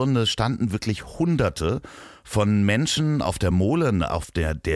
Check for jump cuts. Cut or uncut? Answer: uncut